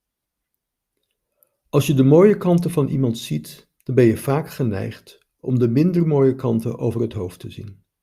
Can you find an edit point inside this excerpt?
yes; 1 cut; at 3.7 s

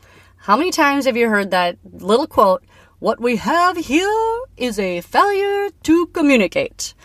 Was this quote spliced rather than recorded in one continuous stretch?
no; 0 cuts

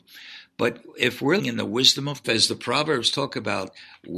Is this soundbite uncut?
no; 2 cuts; at 1.4 s, 2.2 s

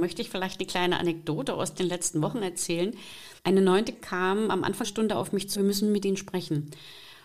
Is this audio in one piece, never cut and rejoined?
no; 4 cuts; at 3.4 s, 3.9 s, 4.8 s, 5.5 s

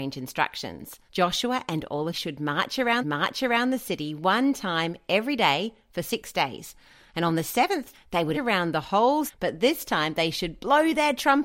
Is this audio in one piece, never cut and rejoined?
no; 6 cuts; at 1.1 s, 2.1 s, 3.0 s, 7.9 s, 8.3 s, 9.3 s

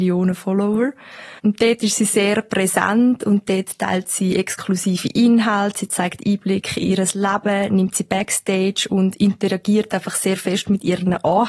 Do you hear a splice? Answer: yes; 1 cut; at 1.4 s

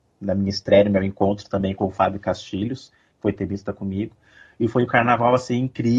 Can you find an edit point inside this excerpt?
no; 0 cuts

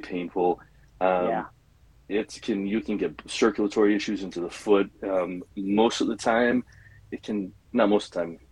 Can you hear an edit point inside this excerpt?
no; 0 cuts

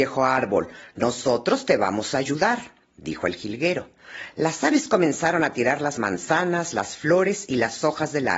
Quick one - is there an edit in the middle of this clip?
no; 0 cuts

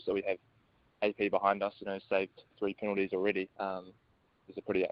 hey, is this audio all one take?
no; 2 cuts; at 2.5 s, 3.5 s

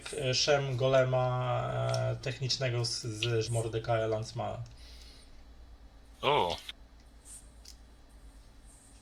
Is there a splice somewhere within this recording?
yes; 2 cuts; at 2.2 s, 3.4 s

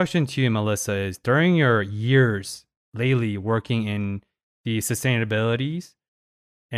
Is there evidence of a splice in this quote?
no; 0 cuts

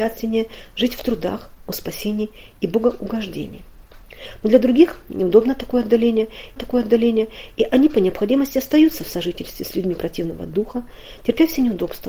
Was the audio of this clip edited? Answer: yes; 1 cut; at 6.6 s

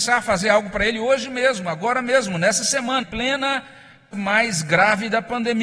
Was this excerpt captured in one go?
no; 2 cuts; at 3.0 s, 4.1 s

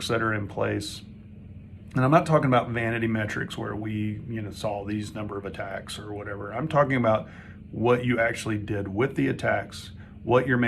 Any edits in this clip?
no; 0 cuts

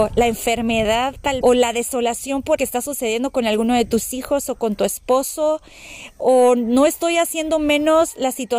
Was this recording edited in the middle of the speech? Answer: yes; 2 cuts; at 1.4 s, 2.6 s

